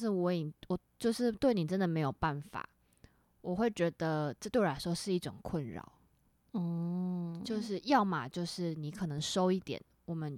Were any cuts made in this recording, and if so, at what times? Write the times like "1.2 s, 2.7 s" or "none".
none